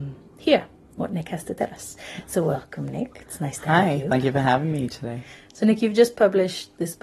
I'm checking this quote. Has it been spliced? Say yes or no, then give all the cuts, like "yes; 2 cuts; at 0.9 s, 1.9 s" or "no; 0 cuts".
no; 0 cuts